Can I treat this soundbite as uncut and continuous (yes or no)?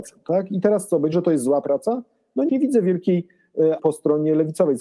no